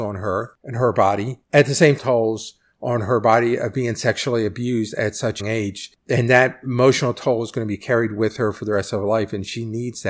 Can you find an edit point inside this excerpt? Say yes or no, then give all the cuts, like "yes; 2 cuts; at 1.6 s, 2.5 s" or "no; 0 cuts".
yes; 3 cuts; at 1.4 s, 2.0 s, 5.4 s